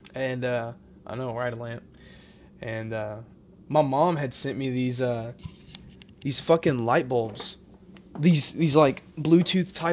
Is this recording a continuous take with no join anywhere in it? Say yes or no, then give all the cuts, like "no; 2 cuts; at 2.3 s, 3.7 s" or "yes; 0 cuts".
yes; 0 cuts